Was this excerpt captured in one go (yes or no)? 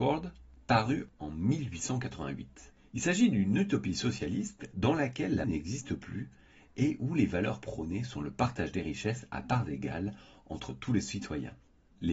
no